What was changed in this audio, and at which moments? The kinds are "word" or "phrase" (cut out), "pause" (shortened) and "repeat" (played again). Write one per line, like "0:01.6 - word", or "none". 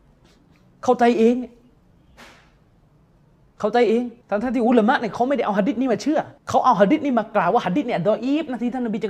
0:04.2 - pause
0:06.4 - pause